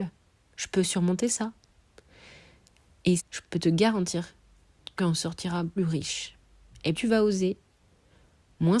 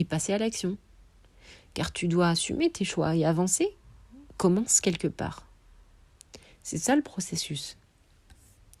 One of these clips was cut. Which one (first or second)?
first